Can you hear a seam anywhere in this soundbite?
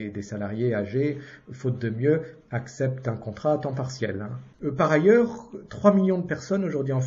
yes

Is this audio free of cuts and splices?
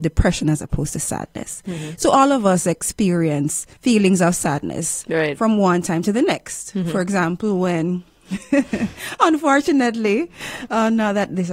no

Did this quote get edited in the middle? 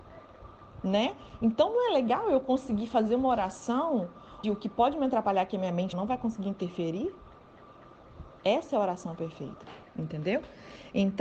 yes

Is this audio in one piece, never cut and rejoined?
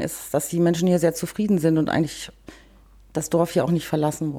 yes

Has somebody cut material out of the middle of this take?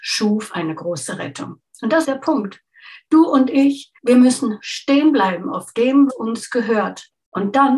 yes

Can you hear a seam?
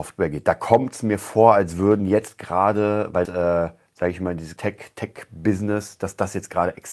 yes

